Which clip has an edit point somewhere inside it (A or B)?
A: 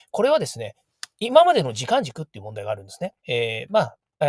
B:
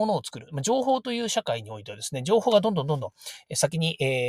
A